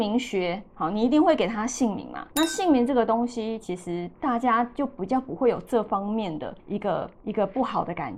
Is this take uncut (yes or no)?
no